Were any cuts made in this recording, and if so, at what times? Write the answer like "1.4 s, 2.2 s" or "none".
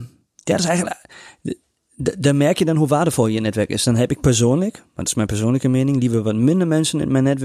none